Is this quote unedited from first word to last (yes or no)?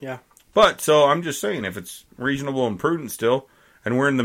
yes